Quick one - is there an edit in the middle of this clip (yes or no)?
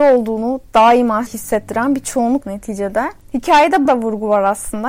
yes